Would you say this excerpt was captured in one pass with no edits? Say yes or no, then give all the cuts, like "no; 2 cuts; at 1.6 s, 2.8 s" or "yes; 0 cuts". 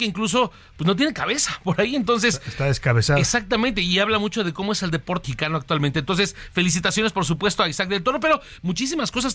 no; 1 cut; at 5.2 s